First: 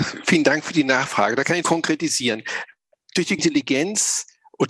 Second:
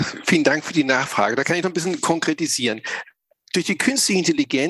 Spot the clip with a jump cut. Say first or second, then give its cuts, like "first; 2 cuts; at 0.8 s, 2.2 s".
first; 2 cuts; at 1.6 s, 3.4 s